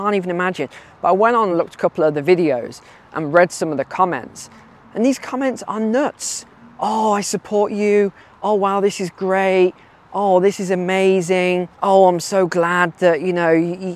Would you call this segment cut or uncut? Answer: uncut